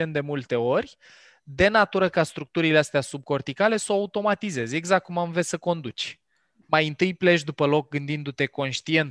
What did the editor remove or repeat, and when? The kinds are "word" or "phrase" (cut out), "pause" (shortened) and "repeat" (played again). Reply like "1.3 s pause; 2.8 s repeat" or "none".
none

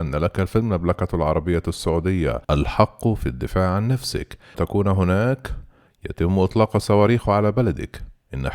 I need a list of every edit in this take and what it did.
2.4 s pause; 4.5 s word

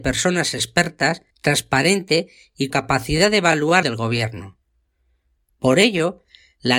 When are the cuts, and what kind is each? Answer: 1.3 s pause; 2.7 s word; 3.8 s phrase

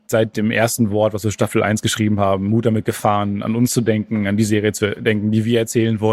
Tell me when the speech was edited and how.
none

